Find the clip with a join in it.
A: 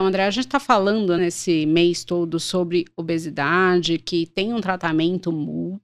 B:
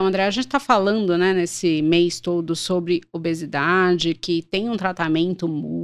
A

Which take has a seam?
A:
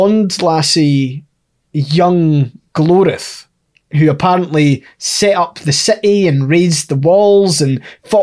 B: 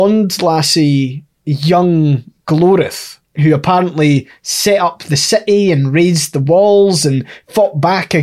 B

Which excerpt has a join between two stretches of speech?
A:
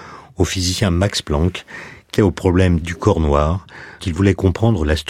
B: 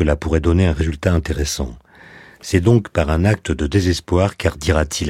A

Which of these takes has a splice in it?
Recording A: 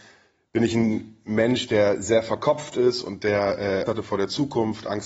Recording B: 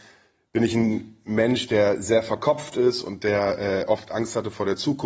A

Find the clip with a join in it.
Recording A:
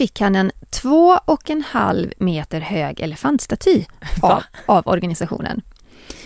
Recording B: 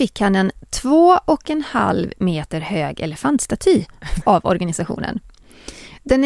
B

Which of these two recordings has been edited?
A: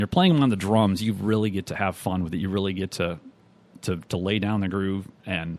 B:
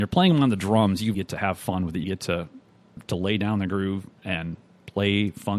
B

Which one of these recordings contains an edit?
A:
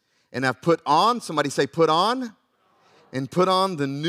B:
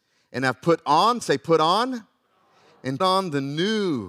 B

